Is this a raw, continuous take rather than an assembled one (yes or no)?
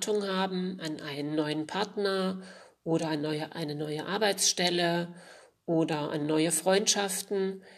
yes